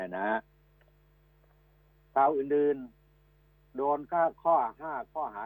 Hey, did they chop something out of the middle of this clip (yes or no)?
no